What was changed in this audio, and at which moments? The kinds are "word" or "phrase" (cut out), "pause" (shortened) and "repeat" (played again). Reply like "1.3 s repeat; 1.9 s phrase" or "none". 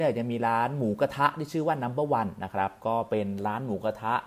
none